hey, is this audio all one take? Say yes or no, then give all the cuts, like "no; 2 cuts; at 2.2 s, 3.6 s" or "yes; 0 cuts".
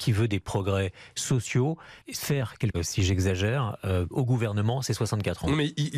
no; 2 cuts; at 2.7 s, 4.1 s